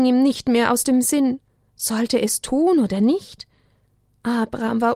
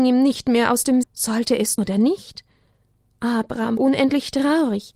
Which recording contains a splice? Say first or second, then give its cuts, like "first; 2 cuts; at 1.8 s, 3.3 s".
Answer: second; 3 cuts; at 1.0 s, 1.8 s, 3.8 s